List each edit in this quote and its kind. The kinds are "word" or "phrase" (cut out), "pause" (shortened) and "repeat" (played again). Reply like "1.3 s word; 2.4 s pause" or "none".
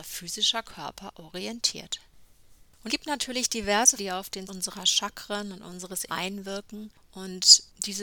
2.9 s word; 4.0 s word; 4.5 s word; 6.1 s word